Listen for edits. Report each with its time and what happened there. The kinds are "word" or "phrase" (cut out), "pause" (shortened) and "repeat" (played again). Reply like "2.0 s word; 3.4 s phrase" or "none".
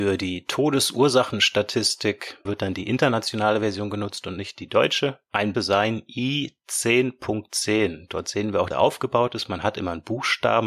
2.5 s word; 5.5 s phrase; 8.7 s phrase

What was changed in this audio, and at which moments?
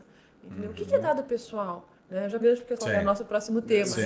2.0 s pause; 2.4 s phrase; 2.8 s word

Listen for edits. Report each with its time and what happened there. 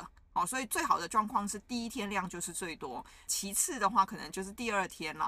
3.3 s word

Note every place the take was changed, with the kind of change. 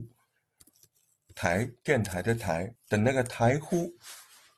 2.7 s phrase

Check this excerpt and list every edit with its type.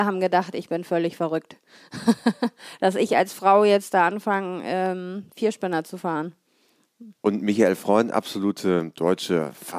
7.1 s pause

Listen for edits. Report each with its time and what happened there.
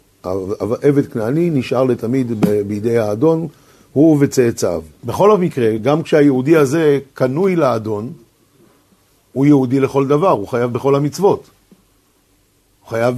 none

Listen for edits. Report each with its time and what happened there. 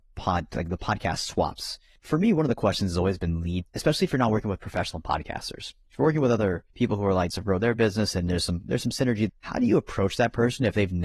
3.6 s word; 6.7 s pause; 7.3 s phrase; 9.3 s word

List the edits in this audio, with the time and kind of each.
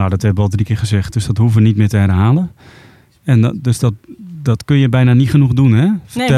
none

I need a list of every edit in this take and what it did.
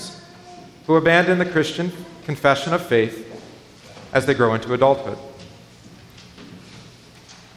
none

